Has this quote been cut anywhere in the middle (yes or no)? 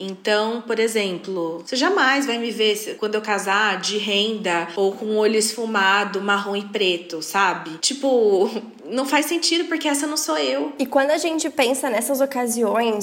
no